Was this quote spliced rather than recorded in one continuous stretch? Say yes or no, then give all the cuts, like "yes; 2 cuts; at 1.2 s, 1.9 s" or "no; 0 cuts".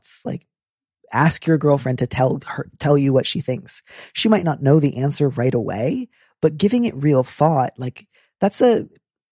no; 0 cuts